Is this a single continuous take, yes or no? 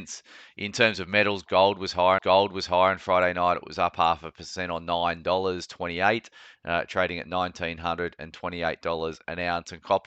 no